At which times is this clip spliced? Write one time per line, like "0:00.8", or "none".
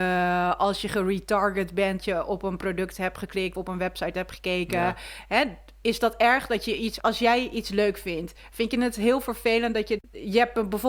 0:02.0
0:03.5
0:07.0
0:10.0